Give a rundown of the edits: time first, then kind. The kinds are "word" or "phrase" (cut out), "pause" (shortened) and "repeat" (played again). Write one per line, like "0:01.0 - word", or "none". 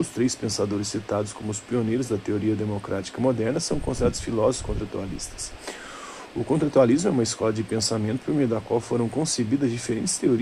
none